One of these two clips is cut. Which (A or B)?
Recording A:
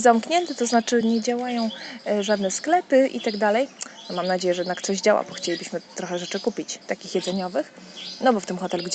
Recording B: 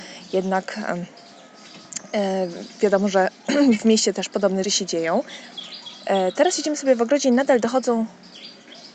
B